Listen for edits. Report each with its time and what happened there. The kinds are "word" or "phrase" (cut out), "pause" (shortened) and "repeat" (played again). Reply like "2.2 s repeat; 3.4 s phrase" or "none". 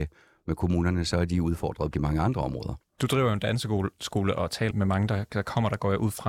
1.9 s word; 4.7 s word